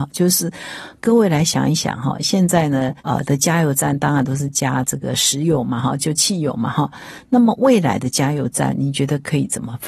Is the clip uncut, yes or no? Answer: no